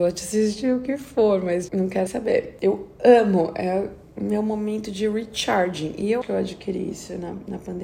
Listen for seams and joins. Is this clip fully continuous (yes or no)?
no